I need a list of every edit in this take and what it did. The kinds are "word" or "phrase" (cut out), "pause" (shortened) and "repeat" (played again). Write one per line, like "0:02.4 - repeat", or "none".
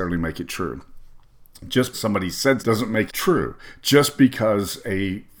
0:01.9 - word
0:02.6 - word
0:03.1 - word